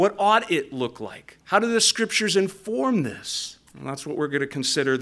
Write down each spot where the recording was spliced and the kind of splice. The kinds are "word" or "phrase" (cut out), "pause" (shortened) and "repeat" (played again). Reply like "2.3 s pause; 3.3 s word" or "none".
1.4 s pause; 3.7 s pause